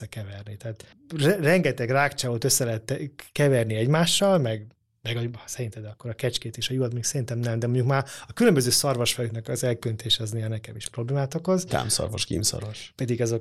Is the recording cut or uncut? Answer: uncut